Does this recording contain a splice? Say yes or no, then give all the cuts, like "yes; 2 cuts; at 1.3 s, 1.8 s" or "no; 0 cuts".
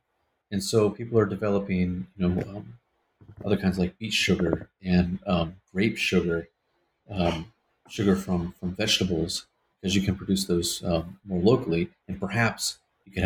no; 0 cuts